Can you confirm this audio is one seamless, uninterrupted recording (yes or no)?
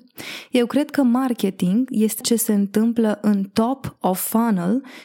no